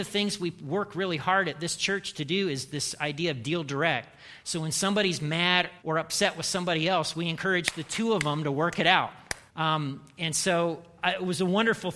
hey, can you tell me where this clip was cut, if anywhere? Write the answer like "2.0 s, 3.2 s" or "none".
5.8 s, 9.5 s